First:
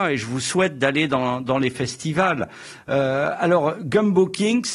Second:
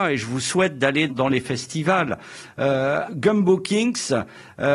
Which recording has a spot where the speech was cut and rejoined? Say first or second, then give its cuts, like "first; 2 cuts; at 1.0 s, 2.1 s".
second; 2 cuts; at 1.1 s, 3.1 s